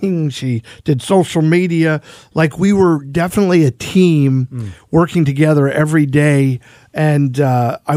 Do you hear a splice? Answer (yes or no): no